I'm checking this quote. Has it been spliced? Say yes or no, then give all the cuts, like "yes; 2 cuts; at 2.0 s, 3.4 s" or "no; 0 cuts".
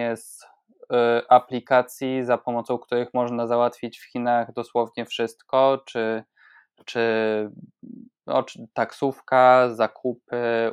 no; 0 cuts